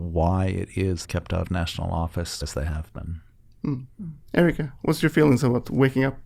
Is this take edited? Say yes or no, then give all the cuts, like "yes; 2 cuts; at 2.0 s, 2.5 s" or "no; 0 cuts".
yes; 4 cuts; at 1.0 s, 1.4 s, 2.4 s, 4.2 s